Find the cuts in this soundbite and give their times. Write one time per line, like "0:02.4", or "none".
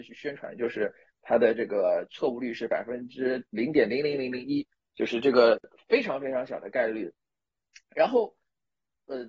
none